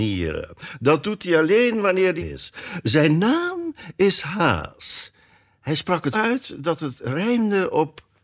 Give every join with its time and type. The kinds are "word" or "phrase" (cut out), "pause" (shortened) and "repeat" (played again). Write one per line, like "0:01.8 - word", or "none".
0:02.2 - word
0:06.1 - word